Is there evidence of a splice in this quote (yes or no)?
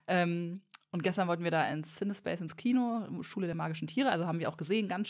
no